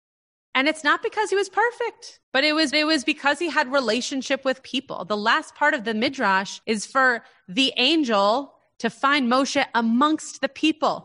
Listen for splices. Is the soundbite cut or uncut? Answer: cut